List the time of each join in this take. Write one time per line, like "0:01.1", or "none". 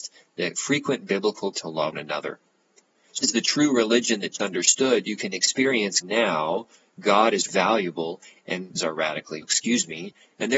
0:01.5
0:01.9
0:03.2
0:04.4
0:06.0
0:07.5
0:08.8
0:09.4